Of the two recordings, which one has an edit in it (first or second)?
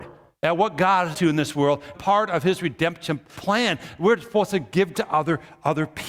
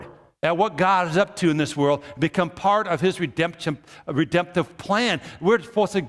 first